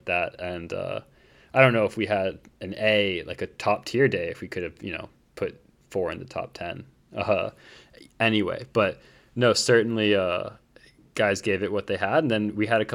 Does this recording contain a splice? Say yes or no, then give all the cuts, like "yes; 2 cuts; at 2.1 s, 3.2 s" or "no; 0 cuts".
no; 0 cuts